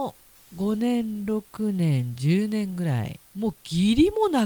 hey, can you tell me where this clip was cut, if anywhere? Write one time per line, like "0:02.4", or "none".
0:03.3